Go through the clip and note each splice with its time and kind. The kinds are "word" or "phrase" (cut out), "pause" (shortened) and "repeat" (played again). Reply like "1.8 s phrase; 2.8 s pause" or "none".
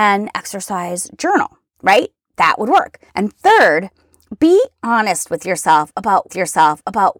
3.1 s pause; 6.3 s repeat